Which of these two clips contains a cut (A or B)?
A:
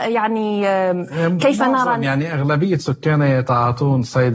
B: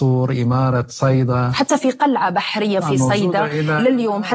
B